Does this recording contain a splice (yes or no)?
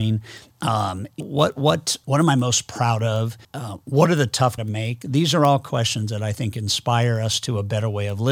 yes